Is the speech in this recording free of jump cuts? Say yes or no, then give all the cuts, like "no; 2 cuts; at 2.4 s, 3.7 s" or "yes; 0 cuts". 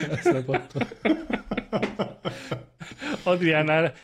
yes; 0 cuts